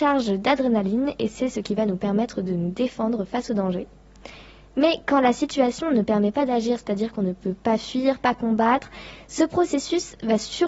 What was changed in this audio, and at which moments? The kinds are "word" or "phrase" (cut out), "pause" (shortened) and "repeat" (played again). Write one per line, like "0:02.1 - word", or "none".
none